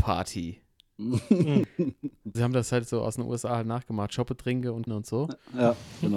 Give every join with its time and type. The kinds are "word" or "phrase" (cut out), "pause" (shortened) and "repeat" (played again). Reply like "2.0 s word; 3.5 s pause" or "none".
2.3 s word; 4.9 s word